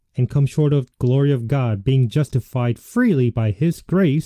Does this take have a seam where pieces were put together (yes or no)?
yes